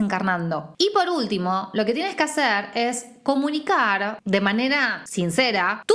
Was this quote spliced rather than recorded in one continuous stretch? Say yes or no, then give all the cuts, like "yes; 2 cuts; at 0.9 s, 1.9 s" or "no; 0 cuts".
no; 0 cuts